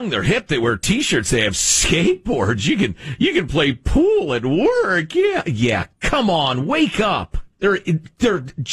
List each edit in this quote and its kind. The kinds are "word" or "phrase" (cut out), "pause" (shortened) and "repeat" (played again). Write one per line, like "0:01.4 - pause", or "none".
0:07.5 - pause